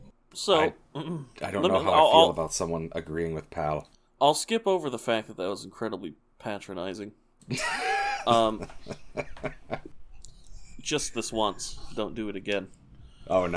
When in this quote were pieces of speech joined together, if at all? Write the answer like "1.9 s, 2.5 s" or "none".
4.1 s

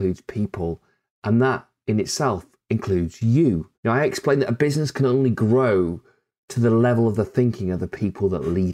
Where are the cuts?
3.7 s

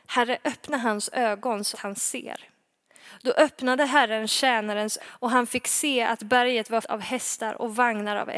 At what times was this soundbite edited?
1.7 s, 5.0 s, 6.8 s

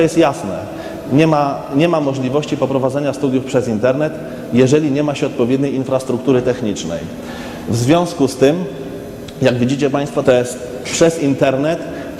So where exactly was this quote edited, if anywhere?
10.2 s

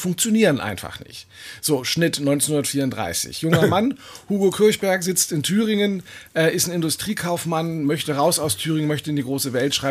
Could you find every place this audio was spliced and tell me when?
none

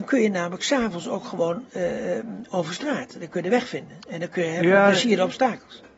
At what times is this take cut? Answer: none

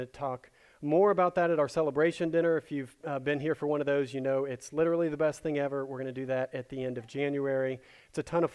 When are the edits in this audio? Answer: none

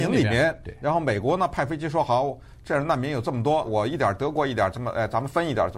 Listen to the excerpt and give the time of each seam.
3.6 s

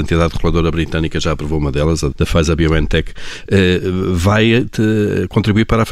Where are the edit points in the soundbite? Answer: 2.1 s

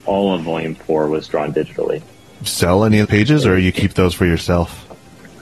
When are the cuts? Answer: 2.5 s, 3.0 s

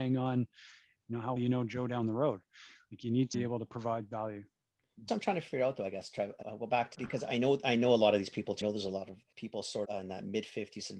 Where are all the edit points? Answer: 1.4 s, 3.3 s, 5.1 s, 6.4 s, 6.9 s, 8.6 s, 9.3 s, 9.9 s

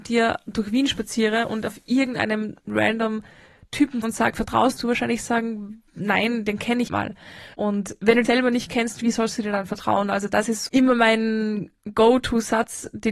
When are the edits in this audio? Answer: 4.0 s, 4.8 s, 5.9 s, 6.9 s, 7.5 s, 8.2 s, 10.7 s

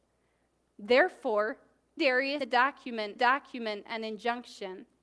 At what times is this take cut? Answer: 2.0 s, 2.4 s, 3.2 s

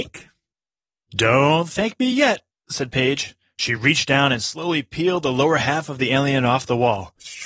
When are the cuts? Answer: none

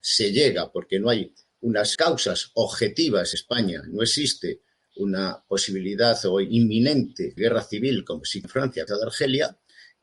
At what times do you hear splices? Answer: 2.0 s, 3.3 s, 7.4 s, 8.4 s, 8.9 s

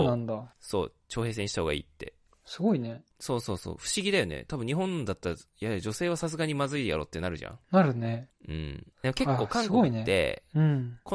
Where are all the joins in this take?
7.6 s, 8.9 s

